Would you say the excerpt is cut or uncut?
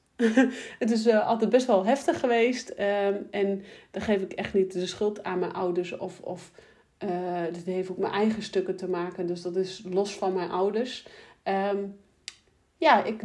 uncut